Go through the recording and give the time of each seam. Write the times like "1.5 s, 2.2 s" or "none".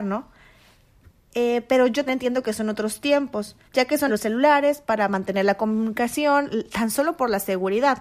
2.1 s, 3.7 s, 4.1 s

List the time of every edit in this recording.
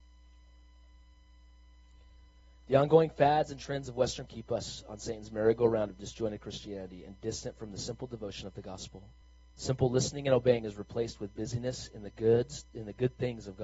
4.3 s, 9.2 s

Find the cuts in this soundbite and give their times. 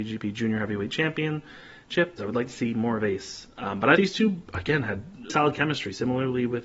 2.2 s, 4.0 s, 5.3 s

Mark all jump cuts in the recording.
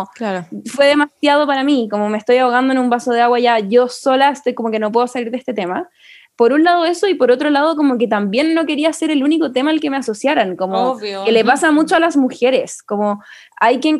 none

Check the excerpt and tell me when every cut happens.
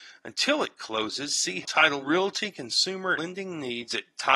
1.6 s, 2.0 s, 3.2 s

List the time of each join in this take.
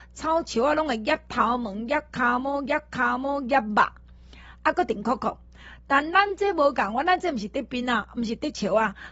2.7 s

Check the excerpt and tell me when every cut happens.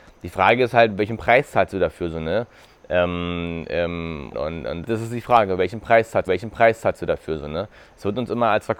4.3 s, 4.8 s, 6.3 s

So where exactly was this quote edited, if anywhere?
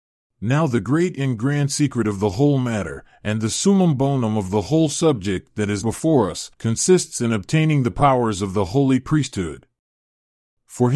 5.8 s, 6.5 s

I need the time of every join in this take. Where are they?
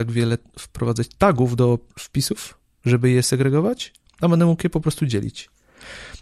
none

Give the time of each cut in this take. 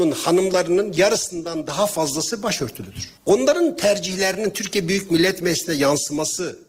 3.2 s

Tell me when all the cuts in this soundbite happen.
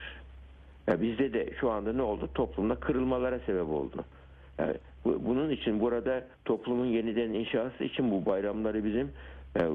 6.3 s

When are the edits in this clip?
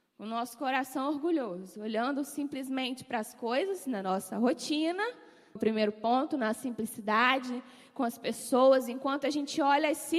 5.6 s

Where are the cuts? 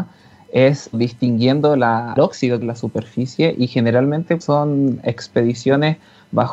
0.9 s, 2.2 s, 2.6 s, 4.4 s

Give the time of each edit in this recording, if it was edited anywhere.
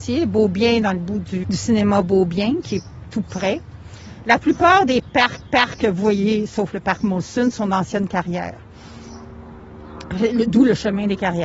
1.4 s, 5.4 s

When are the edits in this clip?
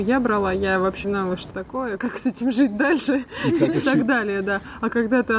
1.0 s, 1.5 s, 2.0 s, 3.8 s

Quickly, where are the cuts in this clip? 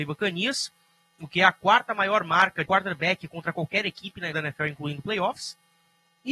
2.7 s, 4.3 s

